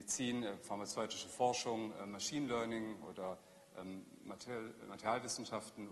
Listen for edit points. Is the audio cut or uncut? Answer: uncut